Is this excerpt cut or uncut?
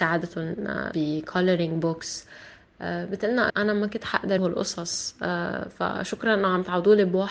cut